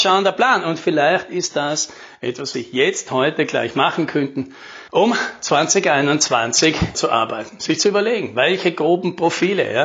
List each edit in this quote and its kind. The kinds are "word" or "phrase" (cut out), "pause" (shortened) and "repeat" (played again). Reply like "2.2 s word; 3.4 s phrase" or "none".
2.5 s word; 4.9 s pause; 6.9 s phrase